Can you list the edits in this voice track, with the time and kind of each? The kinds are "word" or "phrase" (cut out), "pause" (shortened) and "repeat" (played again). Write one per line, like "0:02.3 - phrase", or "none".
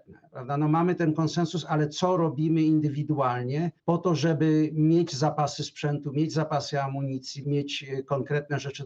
0:03.8 - pause
0:07.4 - word